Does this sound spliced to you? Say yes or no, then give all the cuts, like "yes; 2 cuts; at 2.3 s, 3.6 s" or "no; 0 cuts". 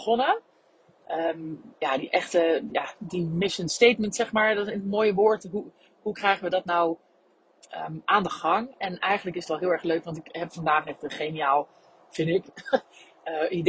no; 0 cuts